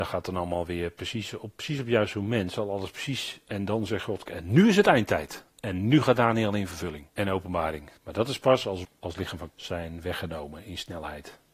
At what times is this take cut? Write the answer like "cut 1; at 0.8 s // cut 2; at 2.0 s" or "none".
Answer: cut 1; at 4.3 s // cut 2; at 7.1 s // cut 3; at 8.0 s // cut 4; at 8.8 s // cut 5; at 9.5 s